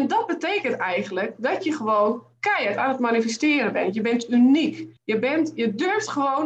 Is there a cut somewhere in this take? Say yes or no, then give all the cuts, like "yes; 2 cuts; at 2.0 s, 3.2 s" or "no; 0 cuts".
yes; 1 cut; at 5.0 s